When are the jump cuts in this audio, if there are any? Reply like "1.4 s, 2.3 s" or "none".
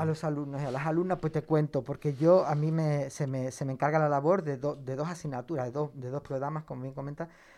none